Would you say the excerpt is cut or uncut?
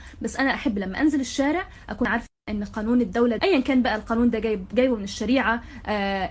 cut